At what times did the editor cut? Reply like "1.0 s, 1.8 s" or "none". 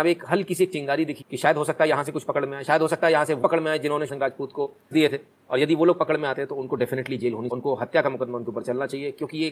1.2 s, 3.4 s, 4.1 s, 4.9 s, 7.5 s